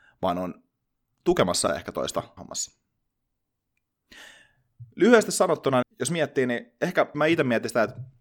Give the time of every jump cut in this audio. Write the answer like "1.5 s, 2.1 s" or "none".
1.7 s, 2.4 s, 5.8 s, 7.1 s

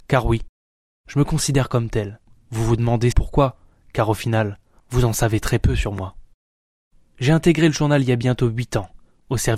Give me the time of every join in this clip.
3.1 s

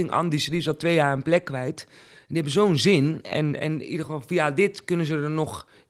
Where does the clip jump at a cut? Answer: none

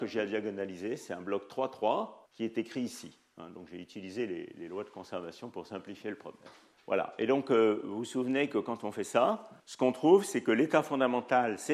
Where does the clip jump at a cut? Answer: 2.3 s, 6.7 s, 9.6 s

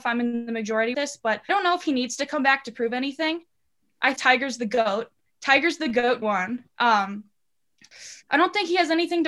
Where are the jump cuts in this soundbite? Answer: 0.9 s, 1.5 s, 4.2 s, 6.2 s

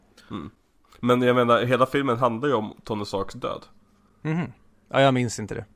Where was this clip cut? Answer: none

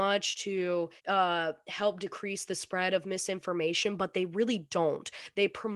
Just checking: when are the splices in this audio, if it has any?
1.0 s

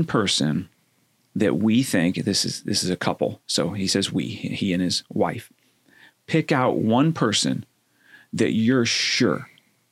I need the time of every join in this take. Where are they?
none

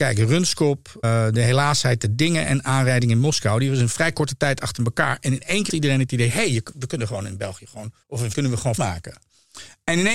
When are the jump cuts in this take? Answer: 1.0 s, 5.7 s, 8.0 s, 8.3 s, 8.8 s

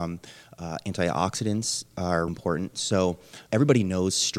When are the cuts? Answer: 2.3 s, 3.5 s

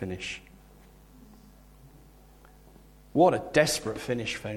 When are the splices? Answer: none

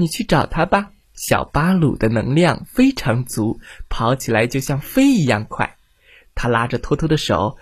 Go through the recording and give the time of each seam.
1.0 s

